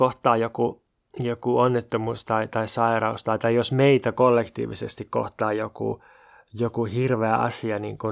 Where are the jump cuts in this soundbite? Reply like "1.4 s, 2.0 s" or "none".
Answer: none